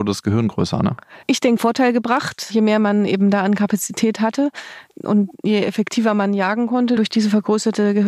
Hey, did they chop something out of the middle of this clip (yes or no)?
yes